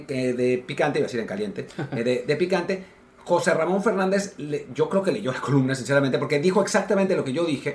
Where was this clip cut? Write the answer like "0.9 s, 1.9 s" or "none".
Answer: none